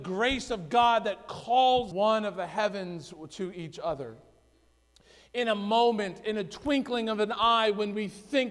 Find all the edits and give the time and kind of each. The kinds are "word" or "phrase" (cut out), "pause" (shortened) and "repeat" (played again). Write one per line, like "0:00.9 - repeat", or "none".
0:01.9 - phrase